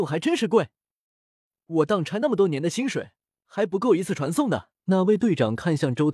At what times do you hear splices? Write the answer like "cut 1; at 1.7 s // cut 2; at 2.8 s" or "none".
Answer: cut 1; at 4.8 s